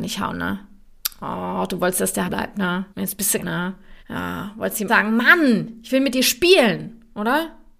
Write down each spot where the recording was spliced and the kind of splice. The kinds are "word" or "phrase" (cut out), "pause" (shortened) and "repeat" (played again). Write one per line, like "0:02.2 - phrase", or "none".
0:02.2 - word
0:02.9 - pause
0:03.4 - phrase
0:04.0 - pause
0:04.9 - word